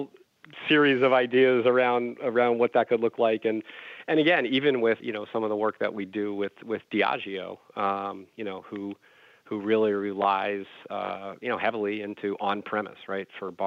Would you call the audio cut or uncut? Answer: cut